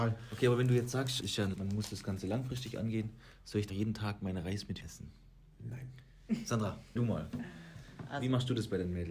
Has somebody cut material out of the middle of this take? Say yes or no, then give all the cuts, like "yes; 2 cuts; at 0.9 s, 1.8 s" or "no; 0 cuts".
yes; 5 cuts; at 1.2 s, 1.5 s, 3.7 s, 4.8 s, 7.0 s